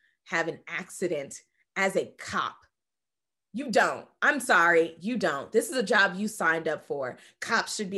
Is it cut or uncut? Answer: uncut